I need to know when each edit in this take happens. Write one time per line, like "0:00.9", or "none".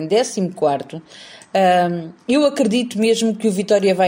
0:02.2